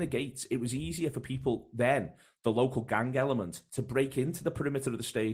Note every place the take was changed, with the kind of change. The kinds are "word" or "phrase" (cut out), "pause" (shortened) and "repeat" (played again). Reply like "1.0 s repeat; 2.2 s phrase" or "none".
none